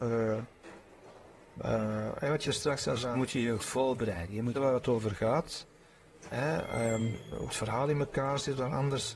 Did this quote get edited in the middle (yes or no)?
yes